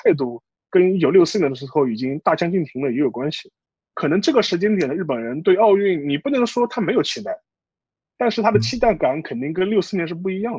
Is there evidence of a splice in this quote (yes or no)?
no